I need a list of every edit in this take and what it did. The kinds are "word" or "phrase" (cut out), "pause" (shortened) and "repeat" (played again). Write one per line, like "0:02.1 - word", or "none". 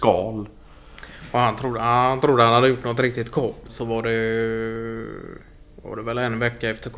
0:03.7 - phrase